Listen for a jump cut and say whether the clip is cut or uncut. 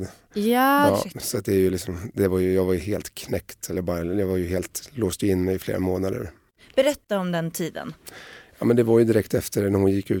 uncut